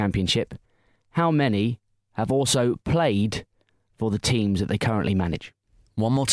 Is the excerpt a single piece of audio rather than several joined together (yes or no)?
yes